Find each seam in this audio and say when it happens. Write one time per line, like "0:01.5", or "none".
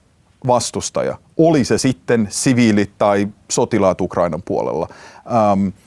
none